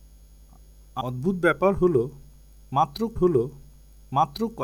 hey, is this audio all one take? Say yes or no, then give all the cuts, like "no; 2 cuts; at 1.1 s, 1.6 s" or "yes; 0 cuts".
no; 2 cuts; at 1.0 s, 3.2 s